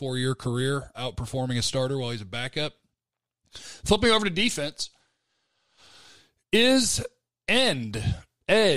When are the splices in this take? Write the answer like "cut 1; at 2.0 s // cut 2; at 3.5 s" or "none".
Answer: cut 1; at 0.9 s